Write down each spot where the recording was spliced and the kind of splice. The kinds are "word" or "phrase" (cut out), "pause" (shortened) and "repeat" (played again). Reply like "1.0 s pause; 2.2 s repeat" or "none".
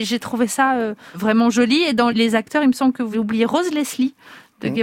1.1 s word; 2.1 s word; 3.1 s word